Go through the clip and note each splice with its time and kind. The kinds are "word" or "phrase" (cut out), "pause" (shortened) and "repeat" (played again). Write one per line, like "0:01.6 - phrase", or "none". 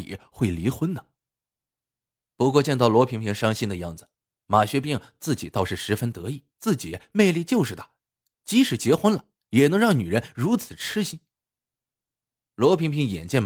0:06.5 - pause